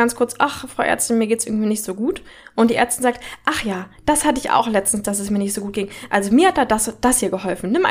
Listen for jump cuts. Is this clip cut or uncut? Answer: uncut